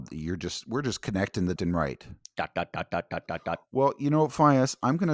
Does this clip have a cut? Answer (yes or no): yes